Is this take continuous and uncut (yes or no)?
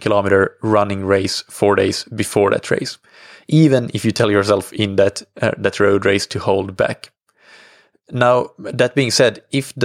yes